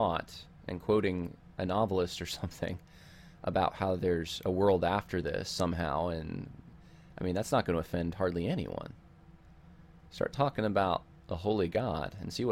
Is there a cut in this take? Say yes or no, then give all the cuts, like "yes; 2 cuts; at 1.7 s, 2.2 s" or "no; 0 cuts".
no; 0 cuts